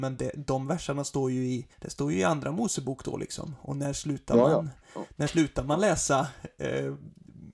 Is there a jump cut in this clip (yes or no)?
yes